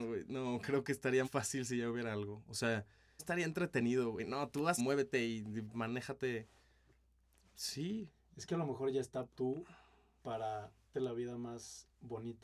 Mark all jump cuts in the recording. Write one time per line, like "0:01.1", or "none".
0:01.2
0:03.2
0:04.8
0:05.7
0:09.3
0:10.9